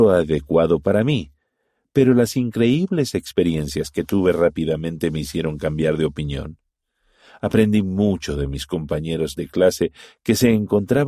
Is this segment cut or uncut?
uncut